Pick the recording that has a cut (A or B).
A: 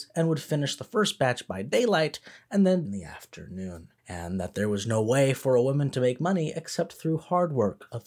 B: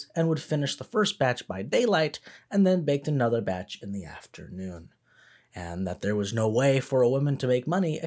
A